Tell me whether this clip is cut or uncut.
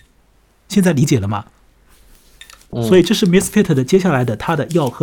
uncut